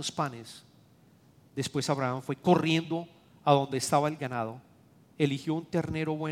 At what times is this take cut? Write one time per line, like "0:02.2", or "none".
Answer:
none